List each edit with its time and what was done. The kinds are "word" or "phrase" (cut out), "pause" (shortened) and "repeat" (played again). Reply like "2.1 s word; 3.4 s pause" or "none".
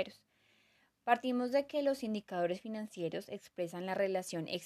none